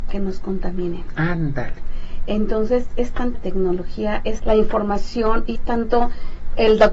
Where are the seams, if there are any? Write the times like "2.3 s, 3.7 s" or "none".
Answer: 2.9 s, 3.3 s, 4.4 s, 5.5 s